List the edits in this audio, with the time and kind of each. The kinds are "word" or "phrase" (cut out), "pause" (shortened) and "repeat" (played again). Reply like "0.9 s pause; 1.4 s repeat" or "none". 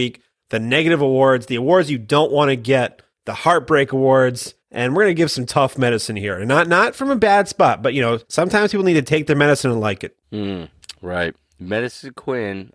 3.1 s pause; 4.6 s pause; 8.2 s pause; 10.2 s pause